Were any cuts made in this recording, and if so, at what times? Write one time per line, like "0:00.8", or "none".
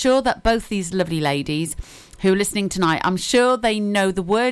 none